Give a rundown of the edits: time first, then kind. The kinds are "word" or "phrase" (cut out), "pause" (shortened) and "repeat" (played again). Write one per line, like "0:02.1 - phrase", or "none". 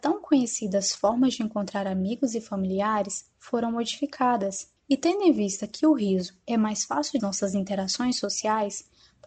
0:04.8 - pause
0:07.2 - phrase